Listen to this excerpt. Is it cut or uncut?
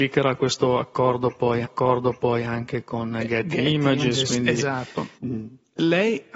cut